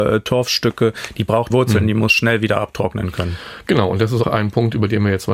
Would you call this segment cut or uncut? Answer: cut